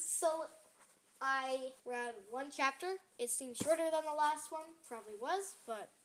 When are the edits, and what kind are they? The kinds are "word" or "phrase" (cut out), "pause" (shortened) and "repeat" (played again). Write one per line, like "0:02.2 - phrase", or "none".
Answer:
0:01.8 - pause